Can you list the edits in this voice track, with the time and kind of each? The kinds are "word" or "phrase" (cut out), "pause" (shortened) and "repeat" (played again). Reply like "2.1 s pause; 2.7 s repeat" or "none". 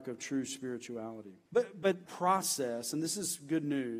1.5 s pause; 2.1 s word